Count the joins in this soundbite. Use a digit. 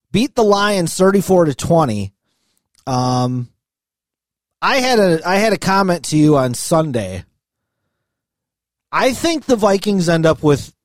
0